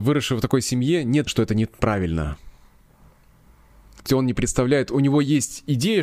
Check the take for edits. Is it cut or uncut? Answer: cut